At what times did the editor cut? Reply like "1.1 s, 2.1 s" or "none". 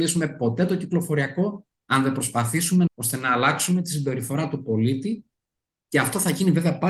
2.9 s